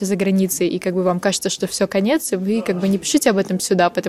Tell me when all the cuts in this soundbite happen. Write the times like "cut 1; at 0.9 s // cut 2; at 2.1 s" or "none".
none